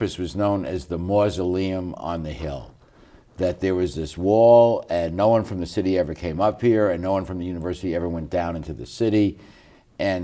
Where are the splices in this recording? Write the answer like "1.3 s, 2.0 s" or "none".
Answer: none